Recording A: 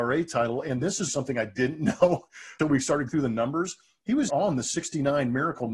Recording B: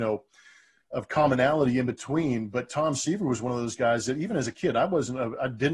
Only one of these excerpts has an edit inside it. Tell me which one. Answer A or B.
A